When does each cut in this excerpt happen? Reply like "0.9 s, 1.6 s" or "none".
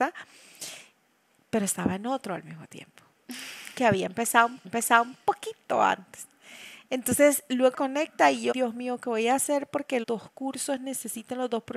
4.6 s, 7.7 s, 8.5 s, 10.0 s